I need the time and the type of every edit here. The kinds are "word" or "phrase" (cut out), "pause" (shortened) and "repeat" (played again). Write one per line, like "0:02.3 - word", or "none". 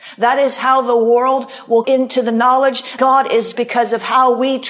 0:01.8 - word
0:03.0 - word
0:03.6 - word